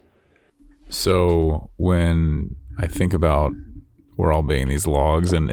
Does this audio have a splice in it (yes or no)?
no